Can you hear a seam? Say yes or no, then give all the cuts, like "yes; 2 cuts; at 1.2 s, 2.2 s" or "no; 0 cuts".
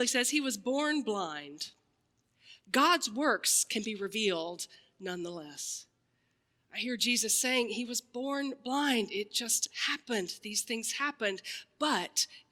no; 0 cuts